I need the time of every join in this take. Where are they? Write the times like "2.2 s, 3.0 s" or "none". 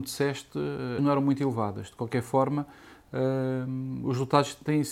1.0 s